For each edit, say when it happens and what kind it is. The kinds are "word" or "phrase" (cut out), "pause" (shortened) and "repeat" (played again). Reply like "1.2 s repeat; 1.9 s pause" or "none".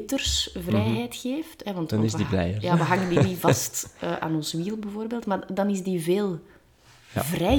none